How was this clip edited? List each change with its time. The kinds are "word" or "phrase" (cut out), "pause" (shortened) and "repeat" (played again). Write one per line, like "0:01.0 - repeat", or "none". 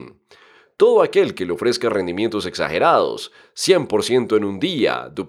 none

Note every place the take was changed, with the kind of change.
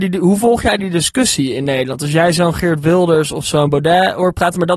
none

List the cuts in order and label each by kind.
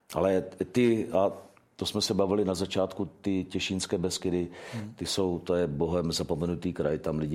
none

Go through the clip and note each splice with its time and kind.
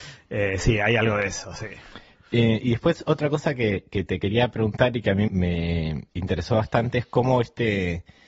0:05.3 - word
0:06.1 - pause

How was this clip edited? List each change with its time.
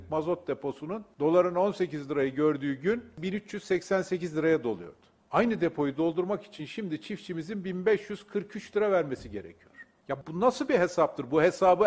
none

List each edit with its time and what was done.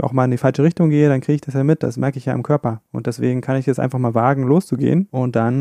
none

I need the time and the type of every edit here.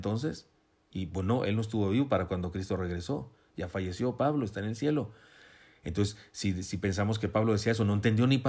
none

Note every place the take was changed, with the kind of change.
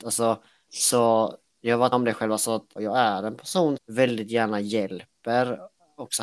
0:01.9 - word
0:02.8 - word
0:03.8 - word

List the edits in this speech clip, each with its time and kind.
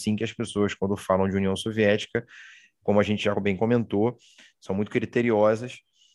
none

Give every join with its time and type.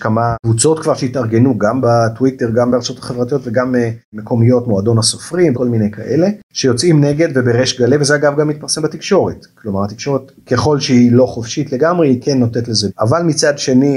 0:05.5 - word
0:12.9 - word

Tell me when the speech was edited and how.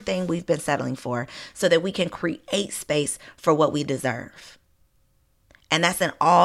none

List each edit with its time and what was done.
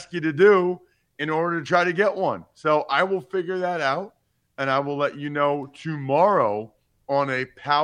none

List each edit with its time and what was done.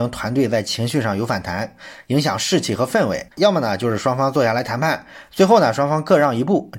0:03.3 - pause

